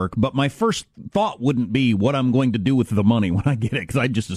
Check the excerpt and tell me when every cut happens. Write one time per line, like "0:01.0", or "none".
none

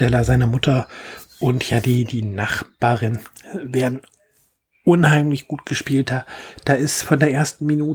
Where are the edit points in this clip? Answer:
none

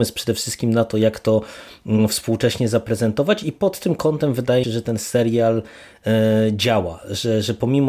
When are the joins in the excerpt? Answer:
0:04.6

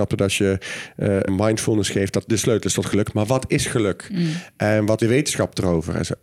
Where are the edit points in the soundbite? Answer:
0:01.3
0:02.3
0:05.0

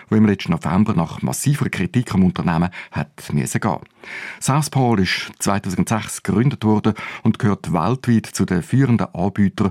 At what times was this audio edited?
none

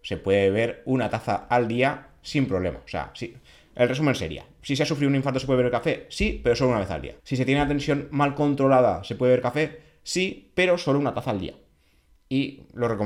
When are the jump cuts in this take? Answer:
0:07.2

